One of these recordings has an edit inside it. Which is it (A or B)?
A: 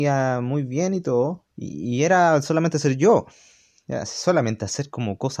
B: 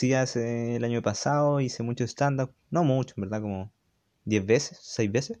A